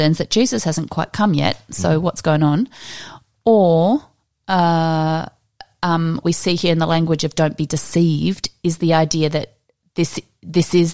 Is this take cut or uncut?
cut